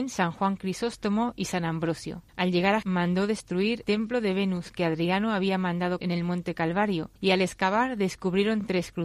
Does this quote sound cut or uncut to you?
cut